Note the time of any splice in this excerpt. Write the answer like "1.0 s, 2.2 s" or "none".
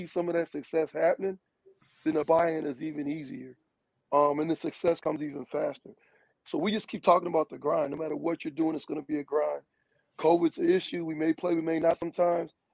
none